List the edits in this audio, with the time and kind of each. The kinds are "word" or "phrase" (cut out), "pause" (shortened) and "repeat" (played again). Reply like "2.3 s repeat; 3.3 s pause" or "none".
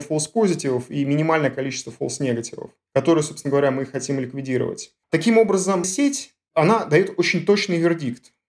5.0 s pause; 5.8 s word